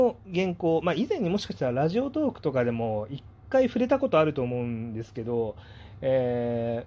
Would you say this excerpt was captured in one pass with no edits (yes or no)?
yes